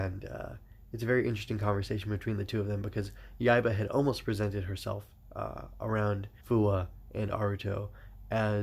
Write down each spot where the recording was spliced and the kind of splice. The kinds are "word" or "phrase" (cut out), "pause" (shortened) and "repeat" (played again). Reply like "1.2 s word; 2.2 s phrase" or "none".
6.4 s pause